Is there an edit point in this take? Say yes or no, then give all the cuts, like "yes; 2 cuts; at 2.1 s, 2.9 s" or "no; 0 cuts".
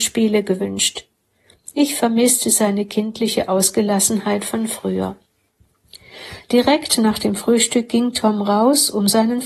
no; 0 cuts